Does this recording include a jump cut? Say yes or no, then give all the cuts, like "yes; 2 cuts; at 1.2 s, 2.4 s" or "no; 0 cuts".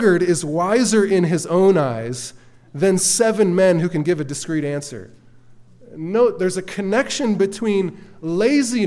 no; 0 cuts